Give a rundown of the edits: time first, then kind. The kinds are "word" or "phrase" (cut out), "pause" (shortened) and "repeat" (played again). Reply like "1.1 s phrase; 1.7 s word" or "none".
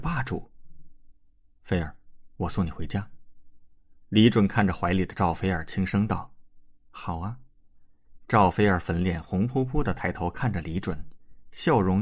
none

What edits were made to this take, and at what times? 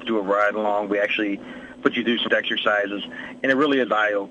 1.8 s word; 2.3 s phrase

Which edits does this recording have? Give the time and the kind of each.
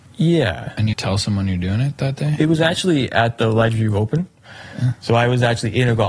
0.9 s phrase

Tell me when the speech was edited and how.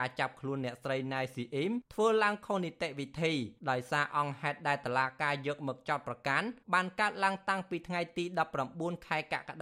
3.6 s pause; 6.6 s pause

